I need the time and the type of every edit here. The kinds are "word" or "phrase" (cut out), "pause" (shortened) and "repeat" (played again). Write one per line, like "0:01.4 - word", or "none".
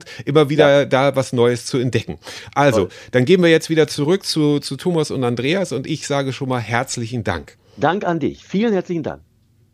0:07.7 - pause